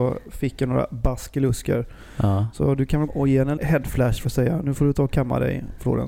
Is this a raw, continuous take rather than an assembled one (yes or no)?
no